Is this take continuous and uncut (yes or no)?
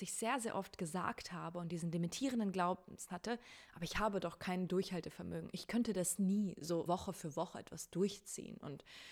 no